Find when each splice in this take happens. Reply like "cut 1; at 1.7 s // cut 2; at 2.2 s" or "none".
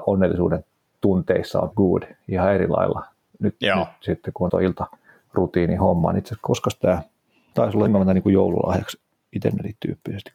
cut 1; at 1.7 s // cut 2; at 4.5 s // cut 3; at 5.1 s // cut 4; at 7.5 s // cut 5; at 7.9 s